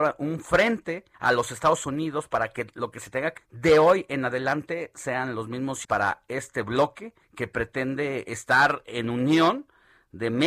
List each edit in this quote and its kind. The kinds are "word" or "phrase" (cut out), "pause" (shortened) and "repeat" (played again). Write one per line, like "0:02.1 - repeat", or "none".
0:01.1 - pause
0:03.4 - word
0:05.8 - word
0:07.2 - pause